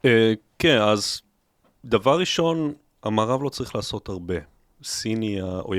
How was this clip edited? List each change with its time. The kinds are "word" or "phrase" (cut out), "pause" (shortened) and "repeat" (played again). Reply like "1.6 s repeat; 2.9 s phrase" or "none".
none

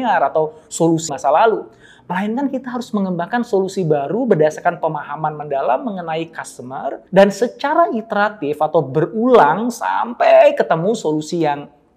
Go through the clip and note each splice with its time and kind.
1.1 s phrase; 7.1 s pause

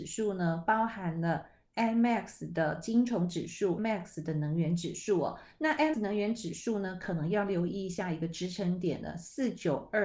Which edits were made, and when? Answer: 3.8 s word; 5.9 s word

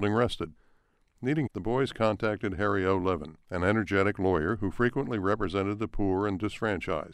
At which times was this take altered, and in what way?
1.5 s word; 3.4 s pause

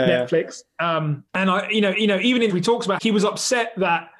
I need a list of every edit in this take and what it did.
1.3 s pause; 1.9 s repeat; 2.5 s phrase; 3.0 s word

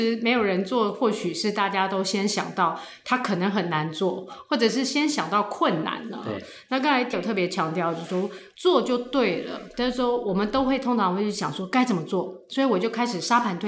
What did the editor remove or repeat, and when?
7.1 s word

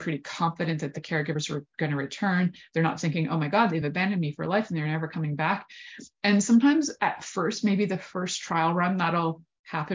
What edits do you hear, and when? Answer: none

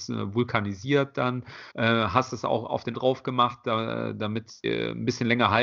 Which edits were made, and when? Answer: 1.7 s pause; 2.9 s word; 4.6 s word

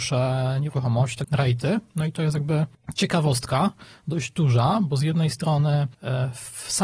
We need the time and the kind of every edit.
1.2 s word

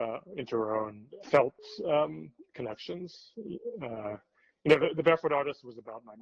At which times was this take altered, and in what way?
1.2 s phrase

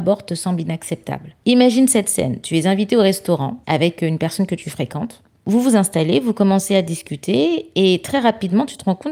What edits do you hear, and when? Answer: 1.4 s pause; 3.6 s pause; 5.3 s pause

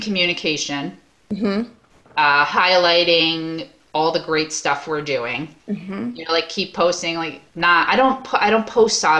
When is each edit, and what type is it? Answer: 5.6 s pause; 7.5 s pause

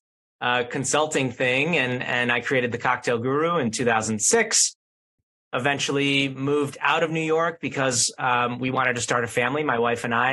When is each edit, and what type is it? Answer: none

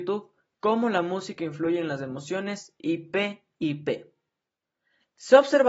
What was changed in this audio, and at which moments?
none

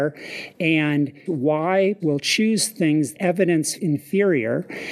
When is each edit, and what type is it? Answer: 1.3 s word; 2.0 s word; 3.1 s word; 3.8 s word

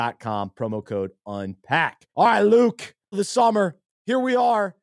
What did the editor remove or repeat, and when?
2.1 s pause; 3.1 s word

